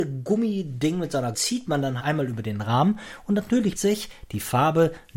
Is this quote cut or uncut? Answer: cut